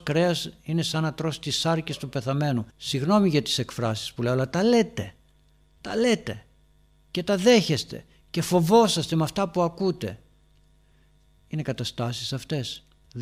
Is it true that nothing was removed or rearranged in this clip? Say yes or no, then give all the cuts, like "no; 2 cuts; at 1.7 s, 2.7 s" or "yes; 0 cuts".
no; 1 cut; at 2.7 s